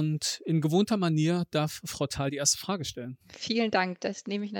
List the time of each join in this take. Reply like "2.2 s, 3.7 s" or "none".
3.2 s